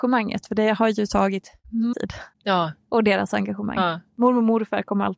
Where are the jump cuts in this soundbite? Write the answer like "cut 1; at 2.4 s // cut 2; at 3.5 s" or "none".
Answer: cut 1; at 1.9 s // cut 2; at 2.3 s